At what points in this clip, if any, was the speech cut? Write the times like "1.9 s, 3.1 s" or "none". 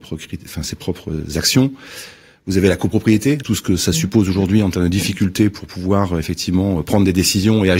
3.4 s